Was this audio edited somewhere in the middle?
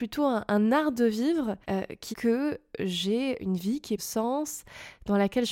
yes; 4 cuts; at 1.6 s, 2.1 s, 3.4 s, 4.0 s

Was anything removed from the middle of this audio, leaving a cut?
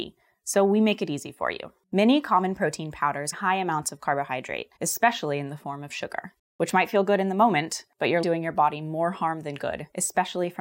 yes; 3 cuts; at 3.3 s, 4.8 s, 8.2 s

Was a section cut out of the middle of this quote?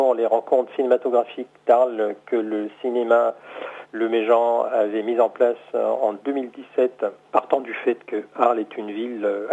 no; 0 cuts

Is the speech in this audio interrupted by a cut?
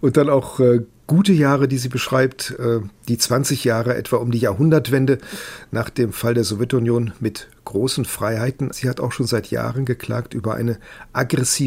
yes; 1 cut; at 8.7 s

